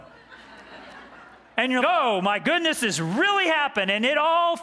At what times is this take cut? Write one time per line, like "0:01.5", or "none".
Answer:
0:01.8